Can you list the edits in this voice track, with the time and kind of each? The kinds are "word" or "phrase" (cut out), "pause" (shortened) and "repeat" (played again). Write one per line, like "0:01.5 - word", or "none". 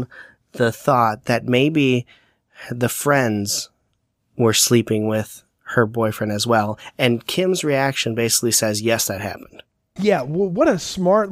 none